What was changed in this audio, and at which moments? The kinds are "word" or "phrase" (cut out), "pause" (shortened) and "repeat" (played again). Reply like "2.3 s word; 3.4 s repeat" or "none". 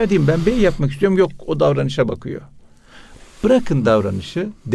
none